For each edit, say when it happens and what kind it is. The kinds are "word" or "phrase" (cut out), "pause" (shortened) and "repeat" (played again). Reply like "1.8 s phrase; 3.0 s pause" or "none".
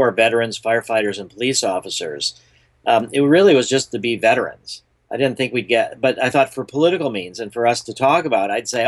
none